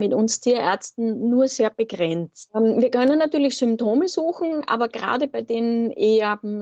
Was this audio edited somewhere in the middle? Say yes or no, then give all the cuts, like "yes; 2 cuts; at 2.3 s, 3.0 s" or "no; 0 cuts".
no; 0 cuts